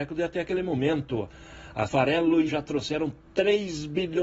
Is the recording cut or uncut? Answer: cut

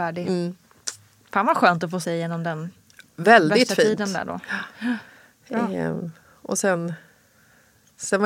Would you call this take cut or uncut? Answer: cut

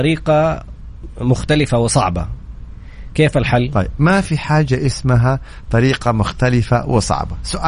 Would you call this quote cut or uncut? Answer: uncut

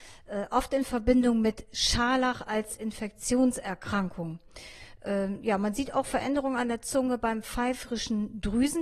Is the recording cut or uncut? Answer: uncut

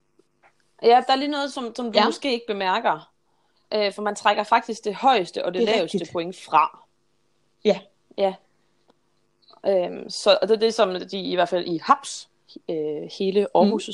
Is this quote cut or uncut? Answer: uncut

